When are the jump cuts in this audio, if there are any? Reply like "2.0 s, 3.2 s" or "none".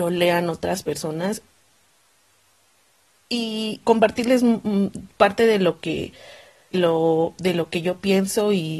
3.8 s, 6.7 s